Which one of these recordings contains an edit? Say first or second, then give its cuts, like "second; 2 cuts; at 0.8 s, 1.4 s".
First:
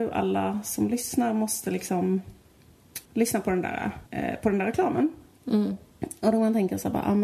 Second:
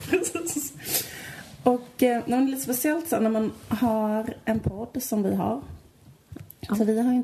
first; 2 cuts; at 3.1 s, 4.1 s